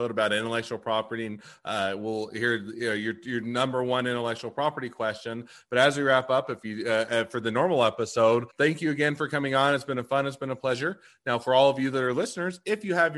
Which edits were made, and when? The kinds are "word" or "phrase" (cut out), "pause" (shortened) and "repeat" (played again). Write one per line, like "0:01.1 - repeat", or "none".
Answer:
0:08.5 - pause